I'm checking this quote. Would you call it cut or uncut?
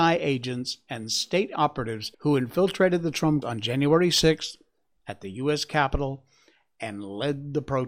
cut